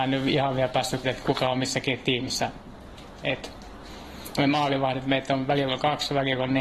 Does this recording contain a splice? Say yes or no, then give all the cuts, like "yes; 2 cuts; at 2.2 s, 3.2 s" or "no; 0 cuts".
yes; 1 cut; at 1.0 s